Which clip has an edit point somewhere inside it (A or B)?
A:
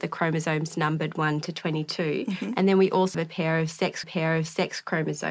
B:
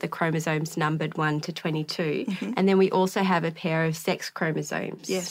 A